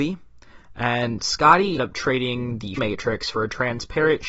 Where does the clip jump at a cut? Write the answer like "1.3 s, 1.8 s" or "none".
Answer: 1.8 s, 2.8 s